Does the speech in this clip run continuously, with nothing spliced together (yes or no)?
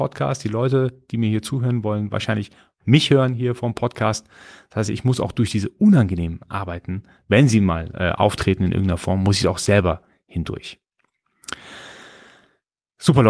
yes